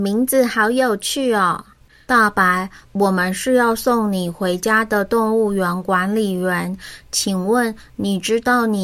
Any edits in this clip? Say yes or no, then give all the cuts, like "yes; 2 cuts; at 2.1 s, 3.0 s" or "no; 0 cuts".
no; 0 cuts